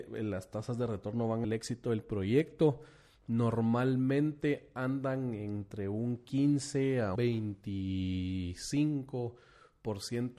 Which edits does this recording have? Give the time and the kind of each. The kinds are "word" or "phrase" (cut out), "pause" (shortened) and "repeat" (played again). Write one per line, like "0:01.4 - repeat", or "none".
0:01.4 - phrase
0:07.2 - word